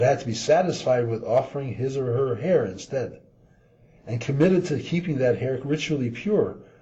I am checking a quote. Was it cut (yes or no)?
no